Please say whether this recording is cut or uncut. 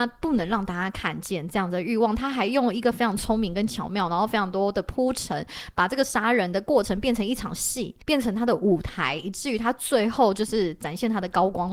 cut